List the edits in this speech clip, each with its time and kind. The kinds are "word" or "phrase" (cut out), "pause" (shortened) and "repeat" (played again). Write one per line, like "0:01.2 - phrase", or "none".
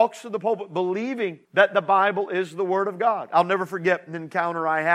0:01.4 - pause